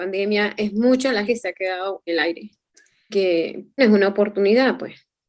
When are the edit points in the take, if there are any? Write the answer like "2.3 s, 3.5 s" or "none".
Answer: 1.3 s, 2.1 s, 3.1 s, 3.8 s